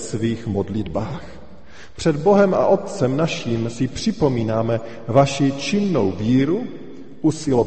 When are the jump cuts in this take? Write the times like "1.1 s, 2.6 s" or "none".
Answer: none

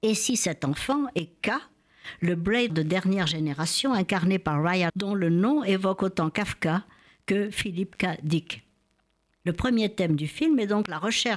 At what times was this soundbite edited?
2.7 s, 4.9 s

